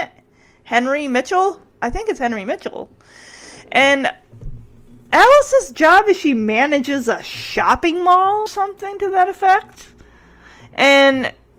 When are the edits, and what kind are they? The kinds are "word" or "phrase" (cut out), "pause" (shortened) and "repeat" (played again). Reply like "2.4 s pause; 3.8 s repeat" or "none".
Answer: 8.5 s word

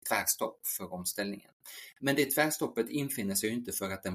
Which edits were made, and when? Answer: none

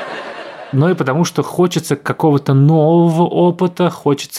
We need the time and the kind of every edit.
none

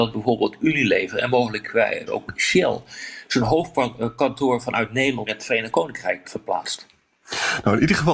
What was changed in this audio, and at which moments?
2.1 s word; 5.3 s word; 6.2 s word

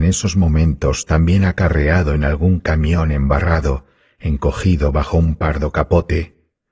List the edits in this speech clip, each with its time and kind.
none

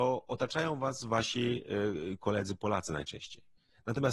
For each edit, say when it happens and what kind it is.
none

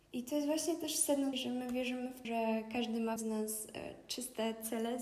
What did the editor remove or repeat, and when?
1.3 s phrase; 2.2 s word; 3.2 s word

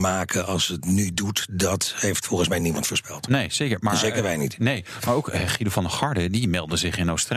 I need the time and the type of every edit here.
none

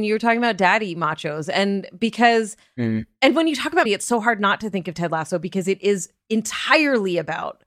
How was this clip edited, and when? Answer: 3.9 s word

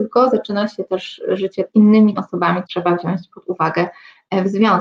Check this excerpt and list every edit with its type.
1.7 s word; 2.2 s word; 2.7 s word

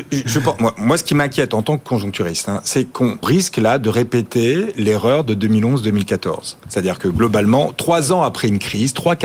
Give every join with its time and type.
3.2 s word

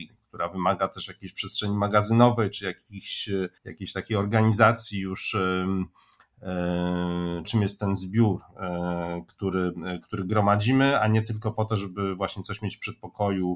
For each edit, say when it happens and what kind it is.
3.6 s pause; 7.4 s phrase

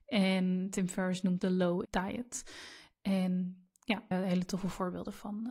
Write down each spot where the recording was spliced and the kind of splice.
1.4 s word; 1.9 s word; 4.1 s word

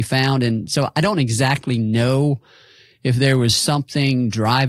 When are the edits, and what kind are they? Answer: none

